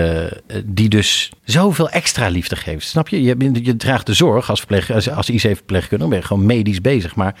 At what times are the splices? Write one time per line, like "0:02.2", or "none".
0:01.4